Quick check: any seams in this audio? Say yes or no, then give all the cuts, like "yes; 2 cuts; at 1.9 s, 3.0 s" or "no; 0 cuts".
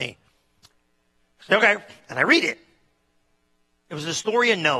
no; 0 cuts